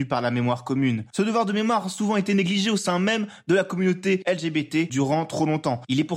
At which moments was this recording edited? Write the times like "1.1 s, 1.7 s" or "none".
none